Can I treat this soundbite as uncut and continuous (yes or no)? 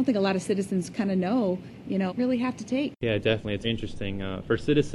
no